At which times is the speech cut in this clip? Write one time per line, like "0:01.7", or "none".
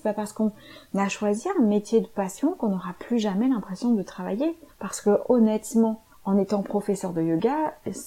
0:04.7
0:06.1

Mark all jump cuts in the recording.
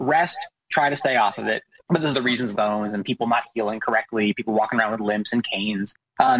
0:02.1
0:02.6

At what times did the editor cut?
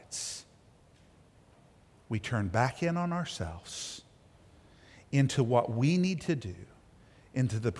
none

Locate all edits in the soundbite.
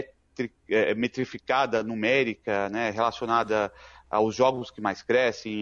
none

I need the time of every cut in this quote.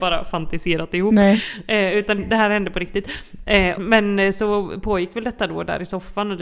0:02.2
0:03.8

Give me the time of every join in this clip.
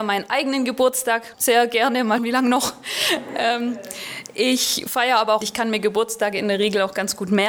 0:01.3
0:02.2
0:05.4

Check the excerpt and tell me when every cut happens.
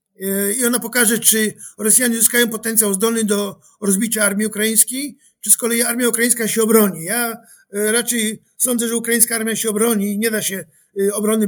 none

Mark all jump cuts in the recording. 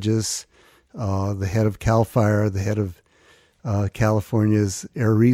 none

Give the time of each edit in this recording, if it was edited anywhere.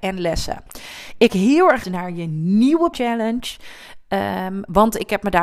0:01.3
0:01.8
0:02.9

